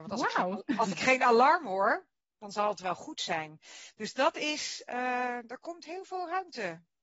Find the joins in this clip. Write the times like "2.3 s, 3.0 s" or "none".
none